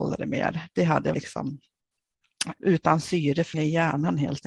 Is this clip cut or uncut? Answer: cut